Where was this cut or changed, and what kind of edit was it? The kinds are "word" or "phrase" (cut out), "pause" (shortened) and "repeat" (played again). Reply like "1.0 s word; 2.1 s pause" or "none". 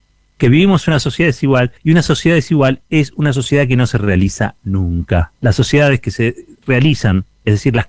1.8 s pause; 5.4 s pause